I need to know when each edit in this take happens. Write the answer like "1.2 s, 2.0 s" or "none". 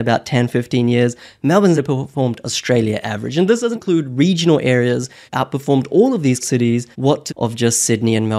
1.8 s, 3.0 s, 3.7 s, 5.3 s, 6.4 s, 6.9 s, 7.3 s